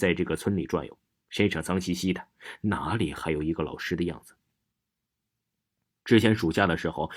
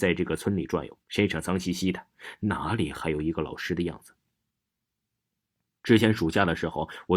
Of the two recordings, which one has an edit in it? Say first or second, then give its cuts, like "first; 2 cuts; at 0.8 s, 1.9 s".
second; 1 cut; at 1.0 s